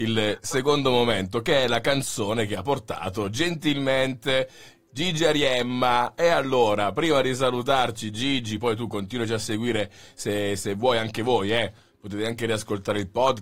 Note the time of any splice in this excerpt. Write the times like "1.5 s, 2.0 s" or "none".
none